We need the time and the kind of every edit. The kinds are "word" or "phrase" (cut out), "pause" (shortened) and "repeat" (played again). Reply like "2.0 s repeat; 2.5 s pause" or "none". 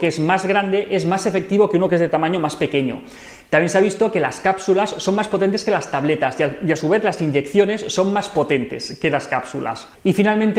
none

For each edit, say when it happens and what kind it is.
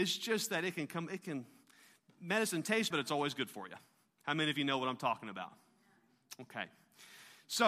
2.9 s word

